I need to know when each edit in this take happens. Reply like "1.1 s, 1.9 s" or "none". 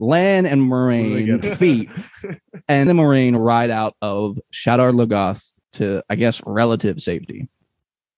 1.4 s, 2.9 s, 5.6 s